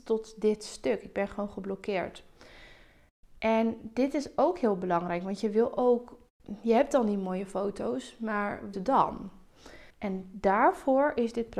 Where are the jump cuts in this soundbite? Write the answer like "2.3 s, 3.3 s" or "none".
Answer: 8.7 s, 9.9 s